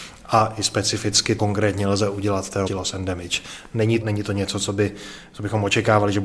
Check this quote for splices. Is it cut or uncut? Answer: cut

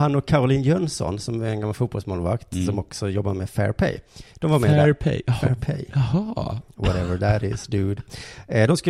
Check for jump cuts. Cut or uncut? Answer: uncut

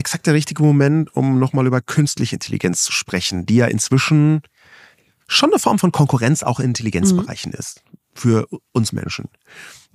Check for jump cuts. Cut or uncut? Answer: uncut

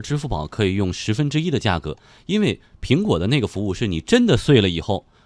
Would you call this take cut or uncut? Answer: uncut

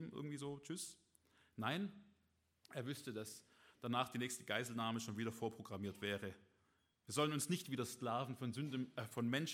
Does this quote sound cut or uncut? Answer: uncut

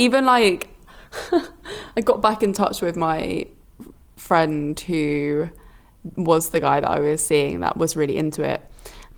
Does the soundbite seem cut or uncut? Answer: uncut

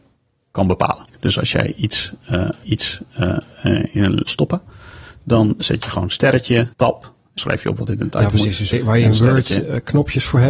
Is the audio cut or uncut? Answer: cut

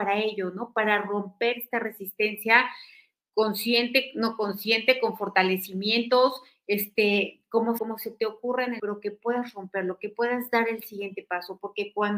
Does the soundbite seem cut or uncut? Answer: cut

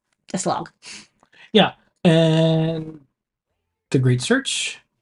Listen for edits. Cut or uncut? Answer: uncut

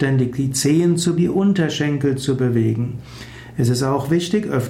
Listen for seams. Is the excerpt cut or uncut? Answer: cut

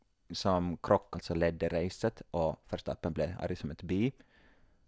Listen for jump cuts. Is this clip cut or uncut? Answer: cut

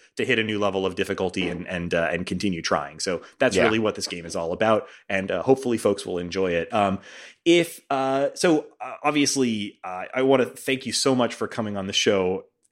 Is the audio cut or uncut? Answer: uncut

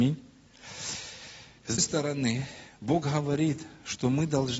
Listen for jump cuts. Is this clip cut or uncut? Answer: cut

